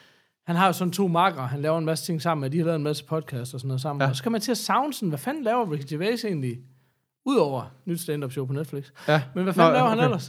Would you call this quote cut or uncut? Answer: uncut